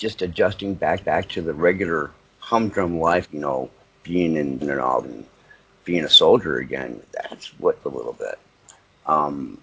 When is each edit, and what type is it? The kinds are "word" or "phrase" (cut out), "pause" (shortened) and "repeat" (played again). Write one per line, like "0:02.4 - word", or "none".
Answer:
0:01.0 - repeat
0:03.2 - word
0:03.8 - pause
0:04.6 - word
0:05.0 - word
0:07.0 - pause
0:07.8 - word